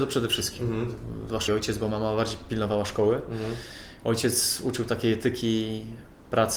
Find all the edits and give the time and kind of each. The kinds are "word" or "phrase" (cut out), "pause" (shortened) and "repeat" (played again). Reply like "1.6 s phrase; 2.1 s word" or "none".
1.5 s word

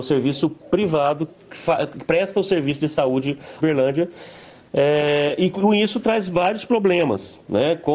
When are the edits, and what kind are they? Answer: 1.3 s word; 3.6 s phrase

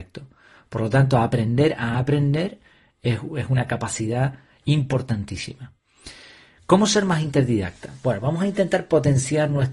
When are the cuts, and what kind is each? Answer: none

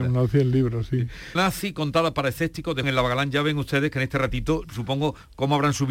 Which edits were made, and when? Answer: 1.4 s word; 2.8 s word; 4.6 s word

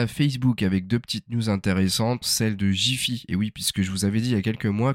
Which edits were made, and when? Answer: 2.2 s word

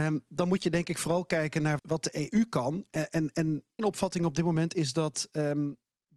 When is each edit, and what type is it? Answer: 1.8 s word; 3.8 s word

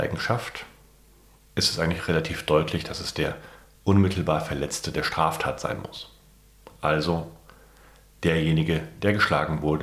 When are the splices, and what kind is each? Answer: none

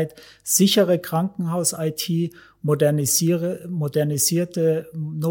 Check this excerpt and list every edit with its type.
none

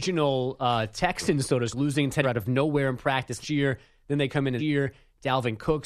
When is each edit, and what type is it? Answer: 1.7 s word; 2.2 s word; 3.4 s word; 4.6 s word

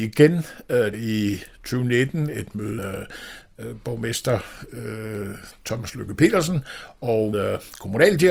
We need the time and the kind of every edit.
0.9 s word; 2.8 s word; 7.3 s word

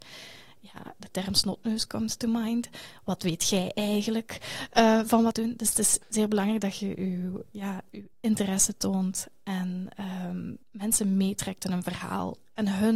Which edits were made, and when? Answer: 1.0 s word; 5.3 s phrase; 6.0 s pause; 8.1 s pause; 10.6 s pause

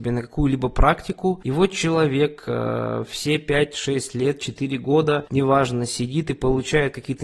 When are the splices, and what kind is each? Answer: none

